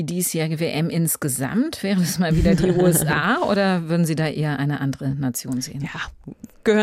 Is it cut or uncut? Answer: uncut